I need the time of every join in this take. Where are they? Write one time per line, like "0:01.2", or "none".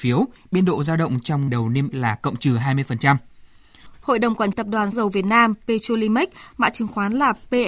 0:01.5
0:01.9
0:04.5
0:04.9